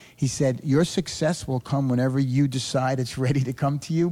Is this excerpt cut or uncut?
uncut